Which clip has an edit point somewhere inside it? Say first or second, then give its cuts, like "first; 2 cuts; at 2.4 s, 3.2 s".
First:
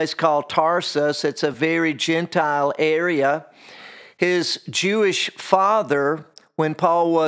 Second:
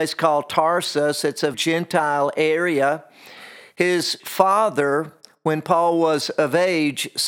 second; 2 cuts; at 1.5 s, 4.2 s